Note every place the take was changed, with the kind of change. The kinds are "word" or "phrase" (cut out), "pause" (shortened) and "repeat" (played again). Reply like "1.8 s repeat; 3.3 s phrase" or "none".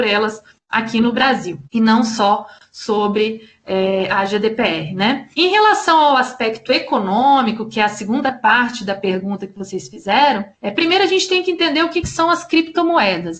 1.6 s pause; 5.3 s pause; 10.5 s pause